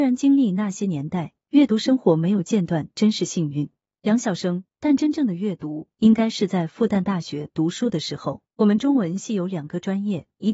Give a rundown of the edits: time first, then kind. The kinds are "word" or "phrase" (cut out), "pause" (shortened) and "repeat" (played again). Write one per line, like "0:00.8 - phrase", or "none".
0:08.5 - pause